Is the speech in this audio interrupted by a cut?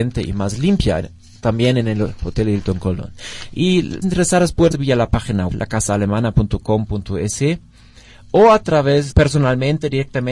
yes; 4 cuts; at 4.0 s, 4.7 s, 5.5 s, 9.1 s

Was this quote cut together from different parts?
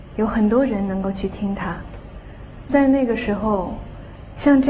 yes; 1 cut; at 2.7 s

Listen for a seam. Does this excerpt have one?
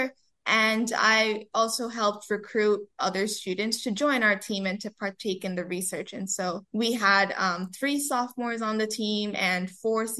yes; 1 cut; at 6.7 s

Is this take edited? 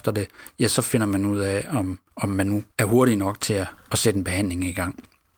yes; 2 cuts; at 2.1 s, 2.7 s

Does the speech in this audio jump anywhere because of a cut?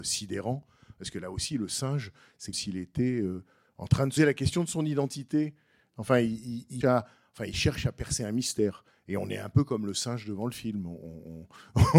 yes; 3 cuts; at 2.5 s, 4.2 s, 6.8 s

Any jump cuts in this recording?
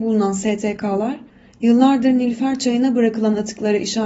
no; 0 cuts

